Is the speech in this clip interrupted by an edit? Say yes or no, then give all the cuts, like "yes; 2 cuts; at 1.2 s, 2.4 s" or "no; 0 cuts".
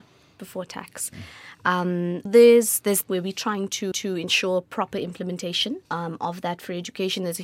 yes; 4 cuts; at 2.3 s, 3.0 s, 3.9 s, 5.9 s